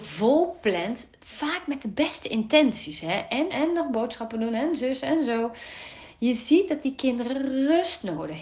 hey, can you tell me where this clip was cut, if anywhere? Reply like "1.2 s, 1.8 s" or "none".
3.5 s